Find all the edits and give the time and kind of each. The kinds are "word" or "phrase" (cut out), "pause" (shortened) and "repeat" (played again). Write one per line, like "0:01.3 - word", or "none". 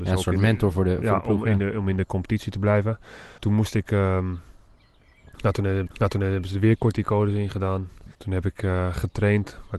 0:03.4 - pause
0:05.9 - repeat
0:08.1 - pause